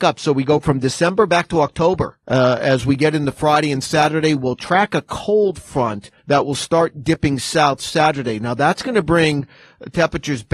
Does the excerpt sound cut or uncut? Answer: cut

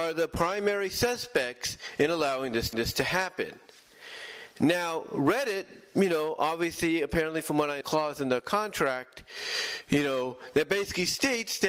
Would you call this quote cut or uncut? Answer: cut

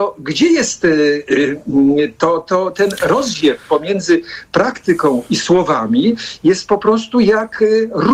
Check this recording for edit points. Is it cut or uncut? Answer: uncut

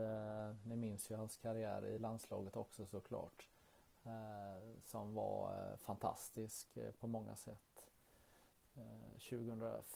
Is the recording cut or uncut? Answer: uncut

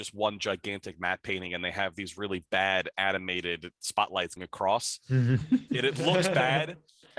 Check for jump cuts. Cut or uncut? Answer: cut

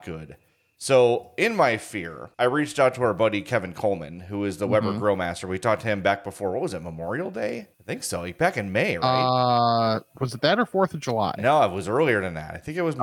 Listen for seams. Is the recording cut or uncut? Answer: cut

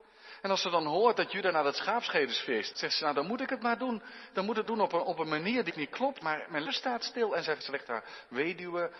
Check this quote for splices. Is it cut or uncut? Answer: cut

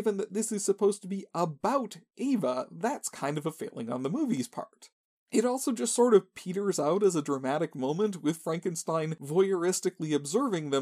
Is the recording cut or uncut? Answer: uncut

